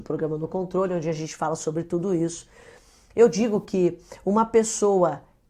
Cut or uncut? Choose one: uncut